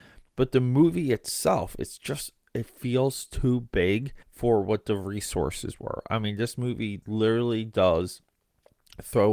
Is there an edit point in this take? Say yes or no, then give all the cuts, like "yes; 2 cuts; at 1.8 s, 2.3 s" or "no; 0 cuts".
yes; 1 cut; at 4.2 s